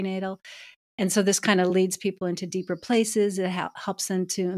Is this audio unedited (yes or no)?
yes